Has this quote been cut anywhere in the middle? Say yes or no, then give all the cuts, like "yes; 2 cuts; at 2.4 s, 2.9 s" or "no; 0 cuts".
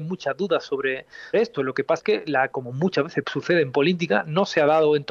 yes; 3 cuts; at 1.3 s, 2.0 s, 2.5 s